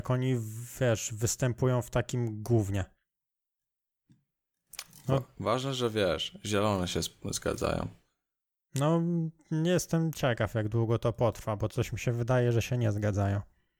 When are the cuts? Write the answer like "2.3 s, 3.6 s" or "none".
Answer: none